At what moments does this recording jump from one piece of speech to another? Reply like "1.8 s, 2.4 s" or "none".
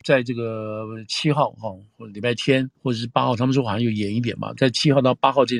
2.8 s